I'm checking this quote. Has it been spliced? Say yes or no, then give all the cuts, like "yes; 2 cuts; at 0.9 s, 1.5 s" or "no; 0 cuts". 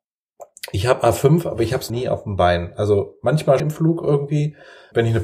yes; 2 cuts; at 1.9 s, 3.6 s